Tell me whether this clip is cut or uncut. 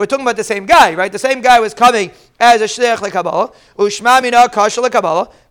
uncut